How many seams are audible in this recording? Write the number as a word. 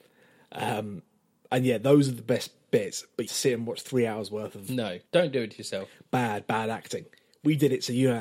two